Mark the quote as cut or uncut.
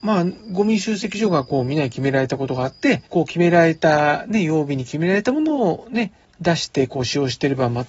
cut